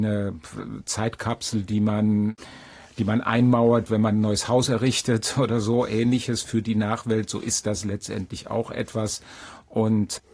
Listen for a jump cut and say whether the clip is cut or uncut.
uncut